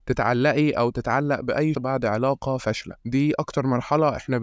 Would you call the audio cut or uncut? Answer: cut